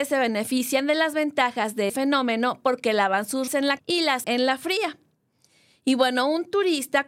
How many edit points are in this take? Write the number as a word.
four